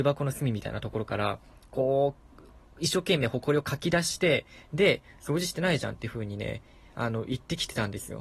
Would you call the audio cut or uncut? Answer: uncut